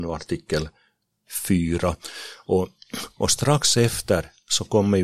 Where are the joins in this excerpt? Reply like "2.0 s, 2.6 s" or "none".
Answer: none

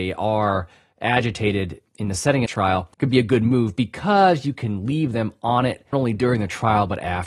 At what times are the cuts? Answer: 2.5 s, 2.9 s, 5.9 s

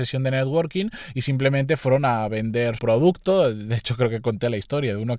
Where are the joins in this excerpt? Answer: 2.8 s

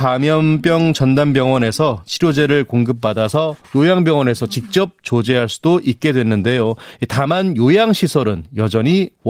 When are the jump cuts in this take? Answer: 3.6 s

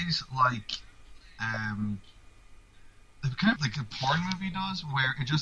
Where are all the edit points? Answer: 3.6 s

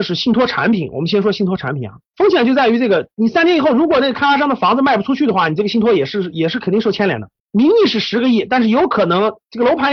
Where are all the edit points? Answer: 2.1 s, 7.4 s

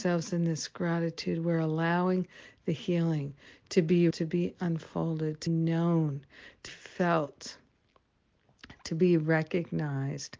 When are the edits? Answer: 4.1 s, 5.5 s, 6.7 s

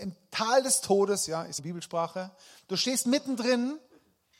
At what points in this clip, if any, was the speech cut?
1.6 s

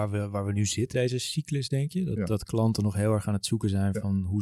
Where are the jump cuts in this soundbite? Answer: 0.9 s

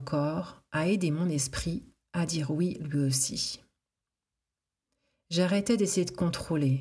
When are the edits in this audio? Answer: none

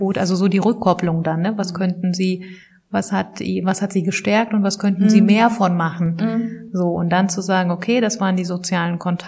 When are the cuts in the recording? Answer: none

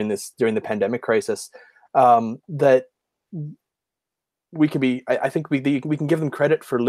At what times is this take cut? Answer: none

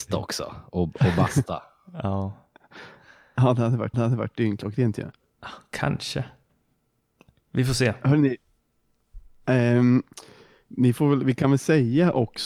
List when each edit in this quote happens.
3.9 s

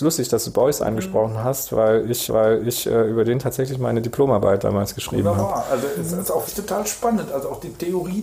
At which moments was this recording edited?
2.3 s, 6.5 s

